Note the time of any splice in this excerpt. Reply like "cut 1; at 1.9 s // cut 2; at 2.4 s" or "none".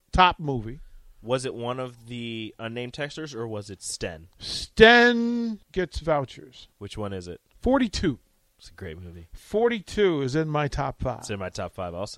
cut 1; at 5.6 s // cut 2; at 6.7 s // cut 3; at 7.5 s